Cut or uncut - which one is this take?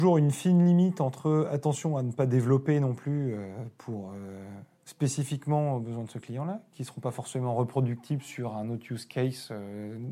uncut